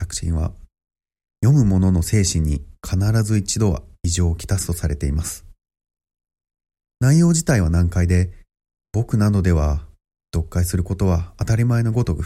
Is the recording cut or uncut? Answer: uncut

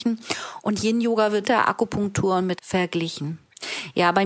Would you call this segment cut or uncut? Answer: cut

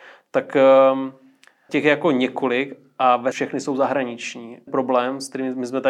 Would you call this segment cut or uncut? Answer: cut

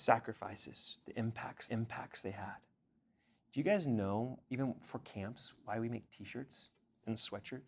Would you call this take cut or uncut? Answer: cut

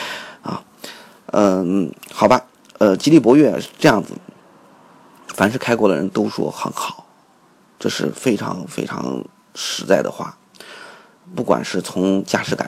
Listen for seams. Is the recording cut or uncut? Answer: uncut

